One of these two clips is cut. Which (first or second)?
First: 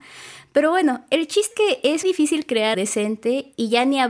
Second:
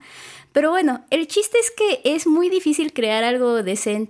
first